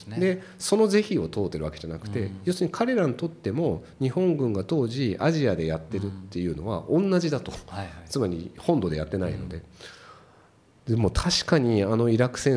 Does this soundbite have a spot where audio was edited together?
no; 0 cuts

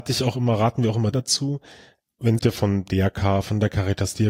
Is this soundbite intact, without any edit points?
no; 2 cuts; at 1.1 s, 2.4 s

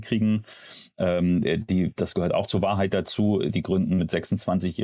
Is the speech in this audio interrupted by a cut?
no; 0 cuts

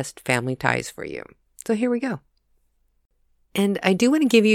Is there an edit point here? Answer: no; 0 cuts

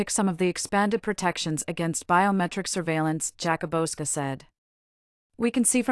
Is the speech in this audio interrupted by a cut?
no; 0 cuts

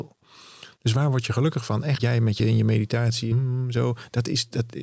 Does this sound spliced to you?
yes; 3 cuts; at 2.0 s, 2.4 s, 3.3 s

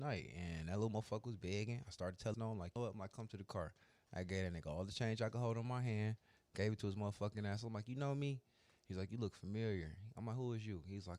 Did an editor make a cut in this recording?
yes; 2 cuts; at 2.3 s, 2.8 s

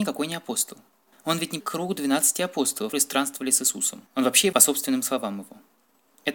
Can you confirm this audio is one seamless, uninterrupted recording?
no; 5 cuts; at 1.1 s, 1.6 s, 2.9 s, 4.1 s, 4.5 s

